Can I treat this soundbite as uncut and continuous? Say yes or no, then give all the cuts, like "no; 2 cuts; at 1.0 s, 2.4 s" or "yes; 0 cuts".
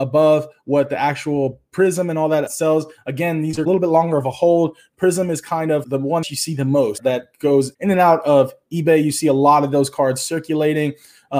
no; 3 cuts; at 2.5 s, 5.8 s, 6.2 s